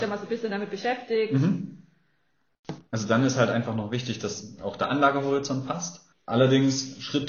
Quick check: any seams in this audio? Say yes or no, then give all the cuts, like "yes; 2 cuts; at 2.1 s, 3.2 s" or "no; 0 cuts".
yes; 2 cuts; at 2.9 s, 6.1 s